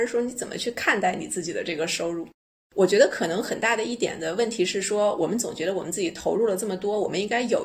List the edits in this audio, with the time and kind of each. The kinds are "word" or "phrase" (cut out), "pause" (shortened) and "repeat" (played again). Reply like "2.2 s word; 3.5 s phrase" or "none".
none